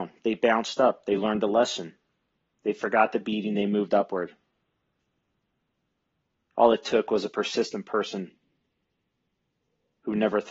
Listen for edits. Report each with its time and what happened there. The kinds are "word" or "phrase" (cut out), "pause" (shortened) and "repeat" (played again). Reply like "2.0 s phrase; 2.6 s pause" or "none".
none